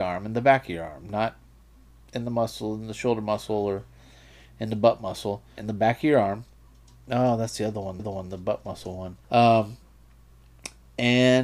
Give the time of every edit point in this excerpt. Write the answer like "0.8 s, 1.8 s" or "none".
5.6 s, 8.0 s, 9.2 s